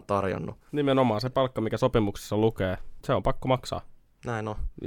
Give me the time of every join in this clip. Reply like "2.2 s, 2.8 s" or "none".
3.0 s